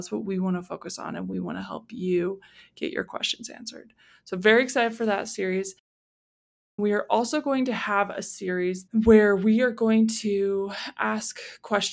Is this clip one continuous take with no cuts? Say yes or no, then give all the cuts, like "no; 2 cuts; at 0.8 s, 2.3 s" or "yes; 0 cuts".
yes; 0 cuts